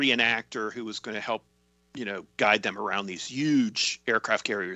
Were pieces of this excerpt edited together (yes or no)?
no